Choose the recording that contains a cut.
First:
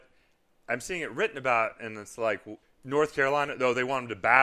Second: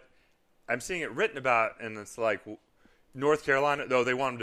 first; 1 cut; at 2.6 s

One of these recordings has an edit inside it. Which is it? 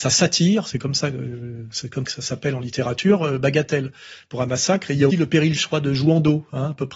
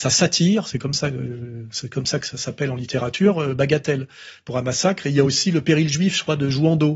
first; 3 cuts; at 2.0 s, 5.1 s, 5.6 s

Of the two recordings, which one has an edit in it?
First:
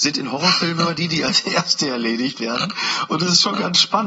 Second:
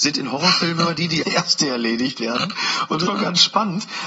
second; 2 cuts; at 1.2 s, 3.1 s

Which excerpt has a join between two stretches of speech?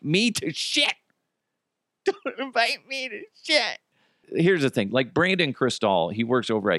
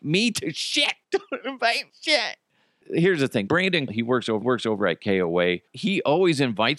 second; 6 cuts; at 1.0 s, 1.9 s, 3.5 s, 3.9 s, 4.4 s, 5.7 s

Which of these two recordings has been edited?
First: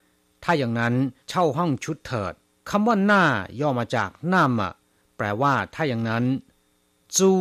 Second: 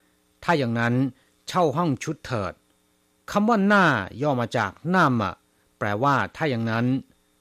first; 2 cuts; at 1.2 s, 2.4 s

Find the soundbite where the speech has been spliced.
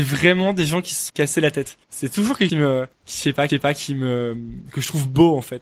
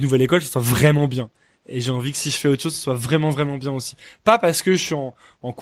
first; 5 cuts; at 1.1 s, 1.8 s, 2.5 s, 2.9 s, 3.5 s

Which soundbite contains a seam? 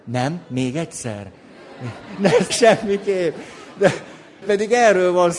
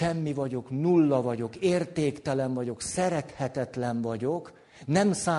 first; 2 cuts; at 2.5 s, 4.4 s

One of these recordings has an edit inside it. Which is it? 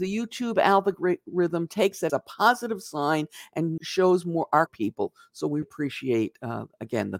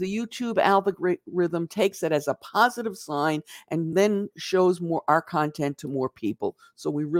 first; 4 cuts; at 2.1 s, 3.8 s, 4.7 s, 5.6 s

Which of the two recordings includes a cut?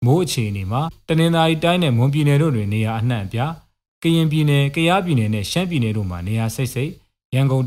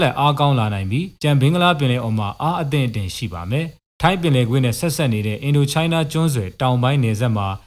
second; 2 cuts; at 1.2 s, 3.8 s

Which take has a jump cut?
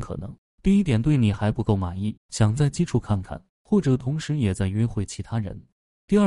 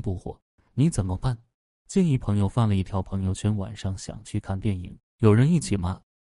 first; 1 cut; at 2.2 s

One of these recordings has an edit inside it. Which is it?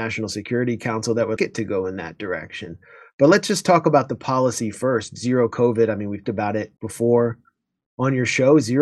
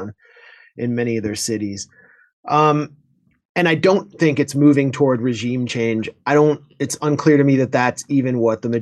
first; 3 cuts; at 1.4 s, 6.2 s, 6.8 s

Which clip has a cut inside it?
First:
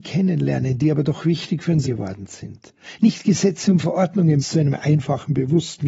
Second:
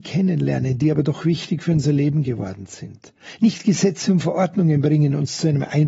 first; 2 cuts; at 1.9 s, 4.4 s

